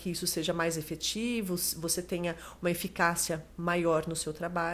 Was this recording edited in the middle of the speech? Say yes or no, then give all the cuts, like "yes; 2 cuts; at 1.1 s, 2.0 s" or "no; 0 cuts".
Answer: no; 0 cuts